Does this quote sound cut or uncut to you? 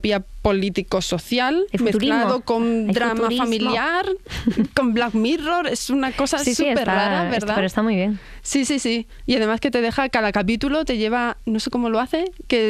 uncut